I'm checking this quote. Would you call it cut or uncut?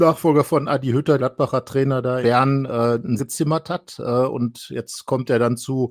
cut